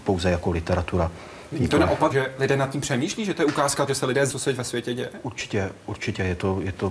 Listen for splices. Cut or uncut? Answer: cut